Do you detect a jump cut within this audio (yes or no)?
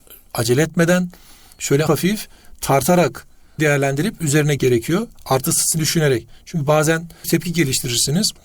yes